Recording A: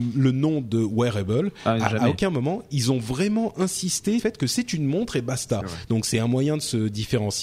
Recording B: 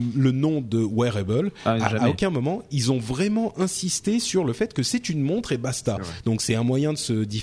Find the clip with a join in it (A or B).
A